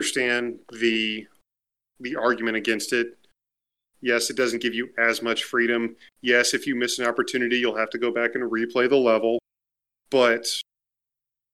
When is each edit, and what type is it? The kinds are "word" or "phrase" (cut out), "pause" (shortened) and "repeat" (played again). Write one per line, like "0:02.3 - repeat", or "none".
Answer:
none